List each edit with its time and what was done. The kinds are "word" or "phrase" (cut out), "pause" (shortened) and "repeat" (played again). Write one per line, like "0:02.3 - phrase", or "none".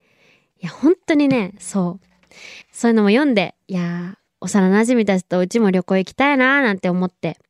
0:02.6 - pause
0:04.3 - pause